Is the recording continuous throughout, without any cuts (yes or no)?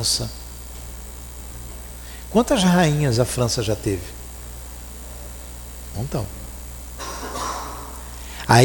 yes